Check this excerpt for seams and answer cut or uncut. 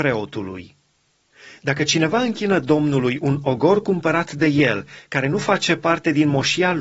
uncut